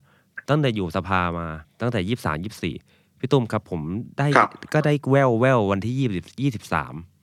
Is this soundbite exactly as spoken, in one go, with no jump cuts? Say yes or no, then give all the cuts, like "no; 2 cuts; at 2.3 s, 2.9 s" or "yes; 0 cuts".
no; 1 cut; at 1.6 s